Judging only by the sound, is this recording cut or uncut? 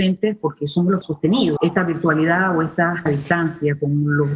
cut